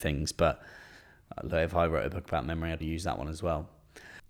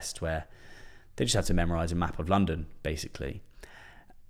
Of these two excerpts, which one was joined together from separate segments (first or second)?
first